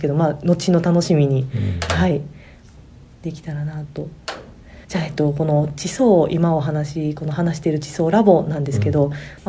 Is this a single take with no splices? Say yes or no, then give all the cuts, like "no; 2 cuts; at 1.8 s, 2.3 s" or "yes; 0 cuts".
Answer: no; 1 cut; at 4.8 s